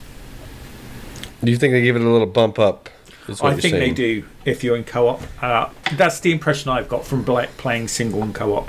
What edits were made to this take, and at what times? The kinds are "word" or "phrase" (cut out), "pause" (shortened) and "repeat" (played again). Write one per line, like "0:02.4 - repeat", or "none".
none